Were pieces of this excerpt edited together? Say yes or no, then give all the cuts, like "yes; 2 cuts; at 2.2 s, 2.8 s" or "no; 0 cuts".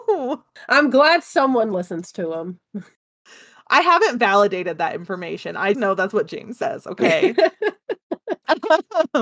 yes; 1 cut; at 5.7 s